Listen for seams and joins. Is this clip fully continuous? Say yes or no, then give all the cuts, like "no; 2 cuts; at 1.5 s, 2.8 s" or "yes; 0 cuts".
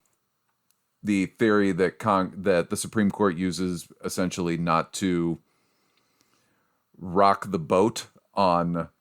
yes; 0 cuts